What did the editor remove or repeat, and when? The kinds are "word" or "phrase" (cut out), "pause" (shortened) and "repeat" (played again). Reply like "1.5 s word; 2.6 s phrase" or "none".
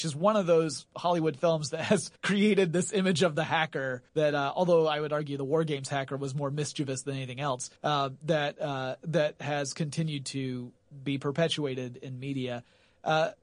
2.2 s pause; 4.1 s pause; 7.8 s pause